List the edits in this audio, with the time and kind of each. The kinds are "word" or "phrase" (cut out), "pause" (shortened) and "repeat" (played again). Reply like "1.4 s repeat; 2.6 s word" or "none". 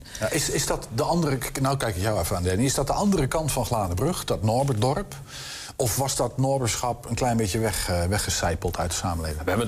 none

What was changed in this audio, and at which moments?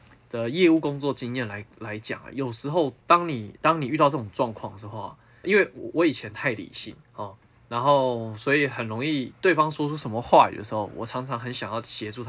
3.0 s pause; 5.4 s word; 7.0 s pause

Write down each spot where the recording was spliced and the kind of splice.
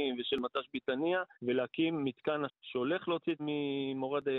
1.3 s pause; 2.5 s word; 3.4 s word

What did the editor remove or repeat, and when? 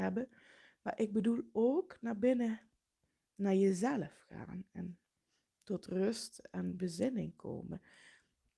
none

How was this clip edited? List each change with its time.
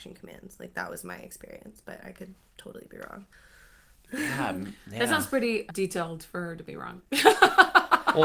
5.7 s word

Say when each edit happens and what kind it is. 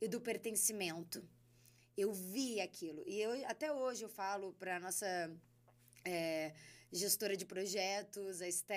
none

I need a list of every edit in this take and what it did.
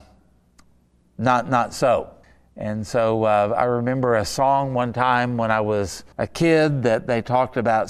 2.2 s pause; 6.1 s pause

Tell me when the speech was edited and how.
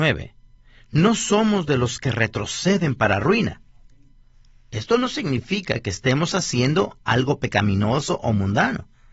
none

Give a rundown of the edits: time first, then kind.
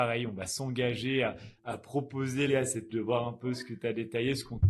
1.6 s word; 2.5 s word; 2.9 s phrase

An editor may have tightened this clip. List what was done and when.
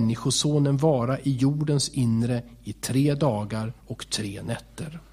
3.8 s pause

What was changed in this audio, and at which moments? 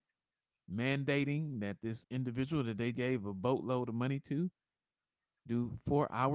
2.0 s word; 2.9 s word

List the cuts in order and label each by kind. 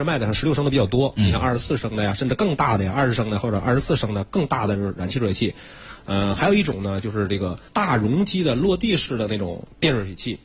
7.7 s pause

